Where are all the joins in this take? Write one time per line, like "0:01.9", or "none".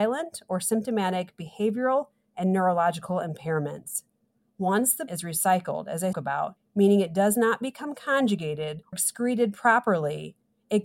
0:05.1
0:06.1
0:08.9